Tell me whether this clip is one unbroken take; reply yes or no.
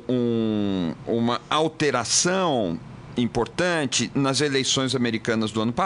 yes